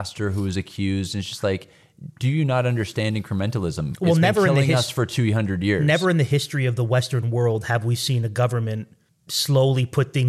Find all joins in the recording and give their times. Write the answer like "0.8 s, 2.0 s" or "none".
none